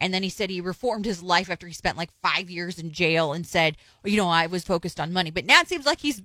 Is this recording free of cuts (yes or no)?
no